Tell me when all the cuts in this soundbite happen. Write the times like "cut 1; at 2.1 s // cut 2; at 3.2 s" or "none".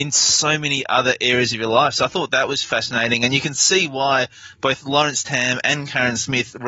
none